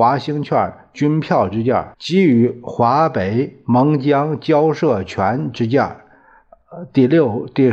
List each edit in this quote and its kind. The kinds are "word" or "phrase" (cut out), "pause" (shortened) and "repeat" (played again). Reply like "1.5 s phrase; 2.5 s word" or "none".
1.9 s pause